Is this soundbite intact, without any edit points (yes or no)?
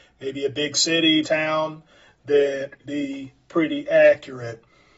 no